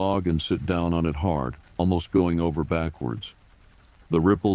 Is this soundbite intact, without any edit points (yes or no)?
yes